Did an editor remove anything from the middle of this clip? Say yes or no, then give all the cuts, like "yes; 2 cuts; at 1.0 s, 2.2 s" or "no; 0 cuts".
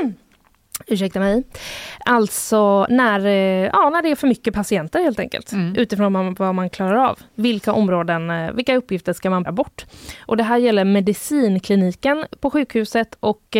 yes; 1 cut; at 9.5 s